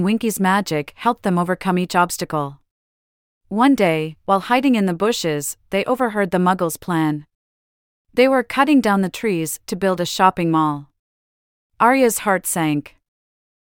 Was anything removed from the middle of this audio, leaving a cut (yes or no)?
no